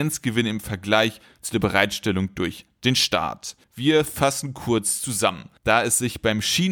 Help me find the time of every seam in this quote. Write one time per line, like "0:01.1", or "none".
0:03.6
0:05.6

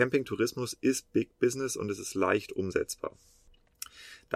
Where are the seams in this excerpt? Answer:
none

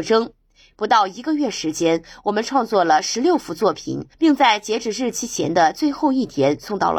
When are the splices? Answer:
0:04.1

